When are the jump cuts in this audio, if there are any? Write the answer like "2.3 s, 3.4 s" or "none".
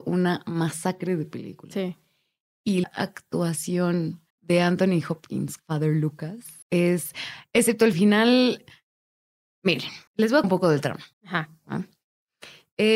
2.8 s, 4.3 s, 5.6 s, 6.6 s, 7.9 s, 10.1 s, 10.4 s, 11.1 s

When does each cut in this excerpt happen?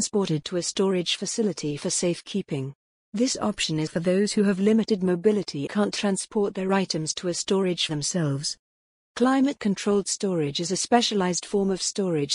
3.9 s, 5.7 s, 7.9 s

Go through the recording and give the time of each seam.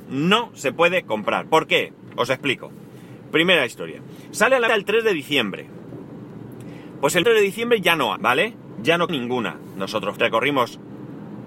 4.7 s, 7.2 s, 8.2 s, 9.1 s, 10.2 s

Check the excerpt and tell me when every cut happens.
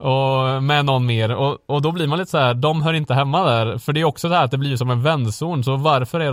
none

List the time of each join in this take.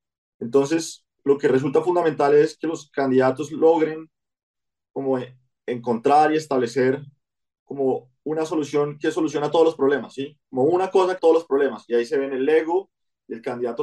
11.2 s

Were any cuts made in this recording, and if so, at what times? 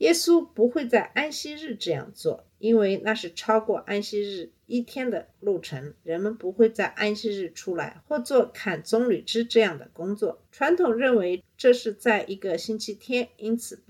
2.5 s, 4.6 s, 5.3 s, 10.5 s

